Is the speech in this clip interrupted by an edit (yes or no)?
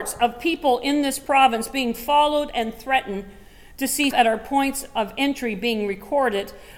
yes